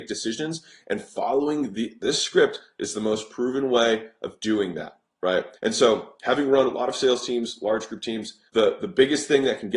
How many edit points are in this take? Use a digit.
2